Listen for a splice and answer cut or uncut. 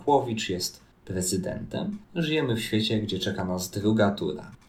cut